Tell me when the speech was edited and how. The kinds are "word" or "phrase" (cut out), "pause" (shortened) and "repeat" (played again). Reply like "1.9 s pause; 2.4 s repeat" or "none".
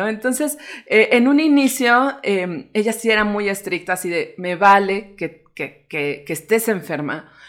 none